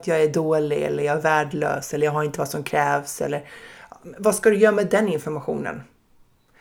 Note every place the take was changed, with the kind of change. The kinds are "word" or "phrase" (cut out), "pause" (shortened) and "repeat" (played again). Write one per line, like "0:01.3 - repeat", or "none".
none